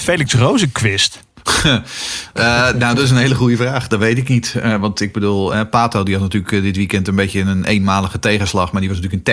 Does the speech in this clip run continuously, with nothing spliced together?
yes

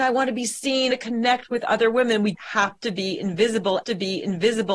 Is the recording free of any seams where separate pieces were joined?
no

